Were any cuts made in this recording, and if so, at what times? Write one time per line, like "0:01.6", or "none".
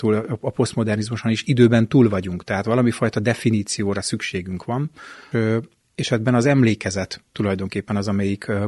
0:05.3